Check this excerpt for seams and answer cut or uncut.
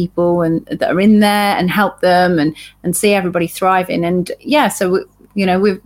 uncut